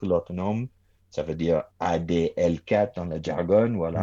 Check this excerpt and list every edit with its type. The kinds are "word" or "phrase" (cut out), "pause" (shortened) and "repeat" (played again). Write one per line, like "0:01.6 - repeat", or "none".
0:01.7 - pause